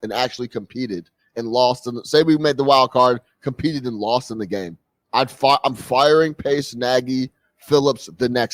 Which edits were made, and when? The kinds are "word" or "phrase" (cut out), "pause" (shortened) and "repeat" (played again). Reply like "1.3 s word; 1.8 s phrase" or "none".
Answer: none